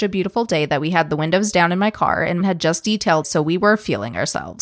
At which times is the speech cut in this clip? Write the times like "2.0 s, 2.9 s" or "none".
2.4 s, 3.2 s